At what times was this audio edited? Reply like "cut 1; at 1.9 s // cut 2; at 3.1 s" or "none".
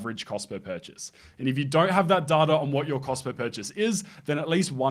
none